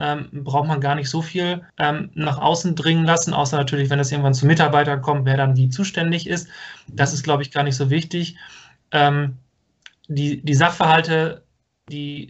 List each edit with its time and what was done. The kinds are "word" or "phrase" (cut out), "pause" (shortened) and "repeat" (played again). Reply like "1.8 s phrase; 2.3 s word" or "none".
1.7 s pause

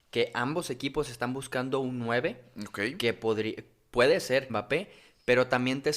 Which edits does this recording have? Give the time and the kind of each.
4.5 s word

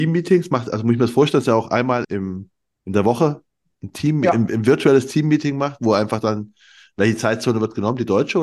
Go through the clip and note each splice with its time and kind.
2.0 s word

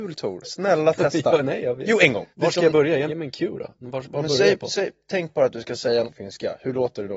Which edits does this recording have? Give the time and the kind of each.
2.3 s pause; 3.1 s word; 6.0 s word

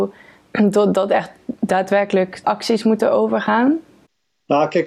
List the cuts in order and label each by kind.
2.4 s word

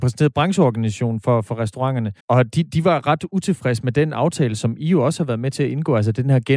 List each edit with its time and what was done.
2.2 s pause

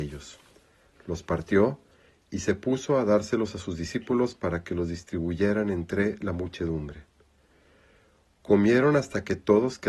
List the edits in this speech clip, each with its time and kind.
none

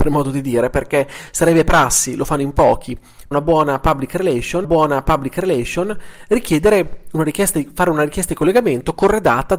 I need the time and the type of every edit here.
3.3 s word; 4.6 s repeat

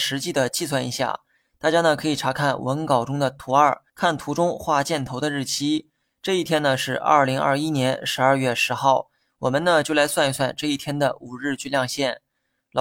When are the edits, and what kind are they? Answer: 3.9 s pause

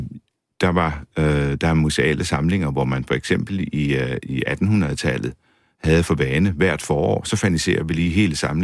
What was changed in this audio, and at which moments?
none

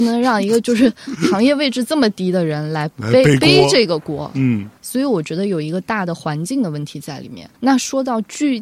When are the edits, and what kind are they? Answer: 4.8 s word; 7.5 s pause

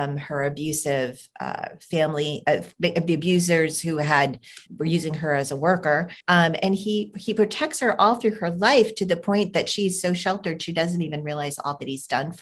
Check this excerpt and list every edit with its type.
4.7 s word; 6.2 s pause

